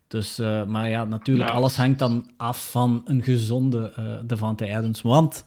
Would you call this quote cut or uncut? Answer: uncut